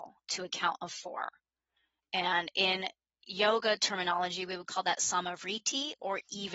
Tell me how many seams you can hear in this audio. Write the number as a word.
zero